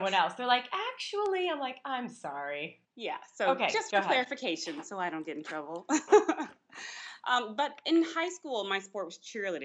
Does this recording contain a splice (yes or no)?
yes